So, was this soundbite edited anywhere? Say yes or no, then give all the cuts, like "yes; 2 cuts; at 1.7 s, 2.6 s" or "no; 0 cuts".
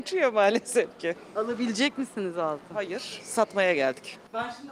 no; 0 cuts